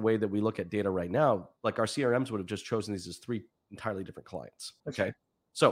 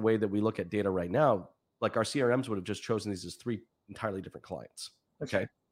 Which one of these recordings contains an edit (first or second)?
first